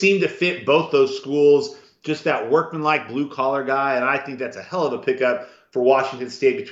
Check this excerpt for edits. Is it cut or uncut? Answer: uncut